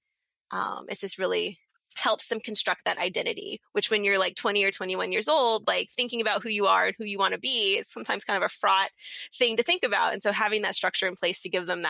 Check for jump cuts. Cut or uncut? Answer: cut